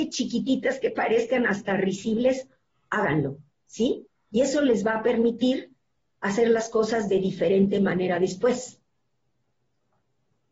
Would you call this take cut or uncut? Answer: uncut